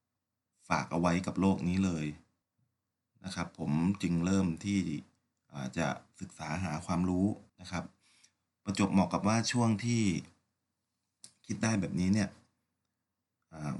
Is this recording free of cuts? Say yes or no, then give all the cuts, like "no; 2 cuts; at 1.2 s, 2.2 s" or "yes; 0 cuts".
no; 1 cut; at 7.5 s